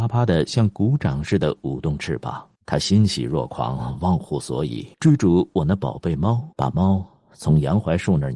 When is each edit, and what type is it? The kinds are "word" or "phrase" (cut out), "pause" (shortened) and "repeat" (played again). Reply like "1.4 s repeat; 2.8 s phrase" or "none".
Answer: 2.6 s pause; 4.9 s pause; 6.5 s pause